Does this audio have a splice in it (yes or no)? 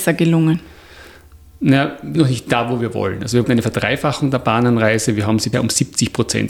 yes